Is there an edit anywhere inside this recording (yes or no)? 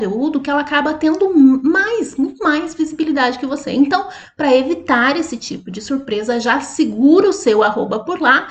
no